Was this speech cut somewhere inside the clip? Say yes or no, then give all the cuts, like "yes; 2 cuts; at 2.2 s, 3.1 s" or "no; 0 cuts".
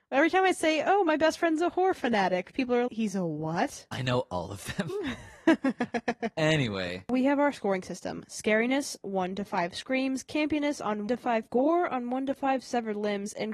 yes; 4 cuts; at 2.9 s, 9.0 s, 11.1 s, 11.5 s